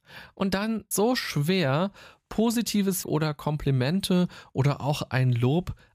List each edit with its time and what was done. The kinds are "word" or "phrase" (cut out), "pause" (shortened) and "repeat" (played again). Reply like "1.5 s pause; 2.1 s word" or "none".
0.9 s phrase; 3.0 s word